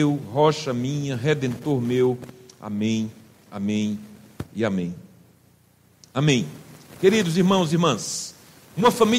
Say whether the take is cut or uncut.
uncut